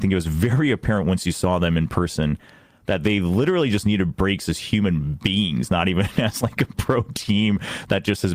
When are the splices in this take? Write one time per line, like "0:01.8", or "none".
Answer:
none